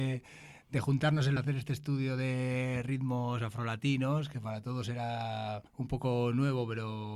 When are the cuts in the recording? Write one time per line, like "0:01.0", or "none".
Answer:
0:01.4
0:05.7